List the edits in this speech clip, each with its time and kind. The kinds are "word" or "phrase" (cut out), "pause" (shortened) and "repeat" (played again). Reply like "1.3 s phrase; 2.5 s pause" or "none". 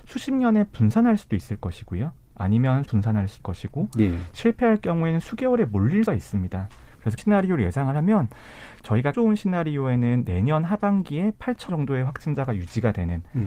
2.9 s word; 3.4 s word; 6.1 s word; 7.2 s word; 9.1 s word; 11.7 s word